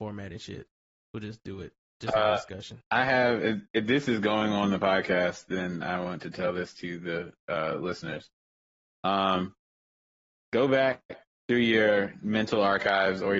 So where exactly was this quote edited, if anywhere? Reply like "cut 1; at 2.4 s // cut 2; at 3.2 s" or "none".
none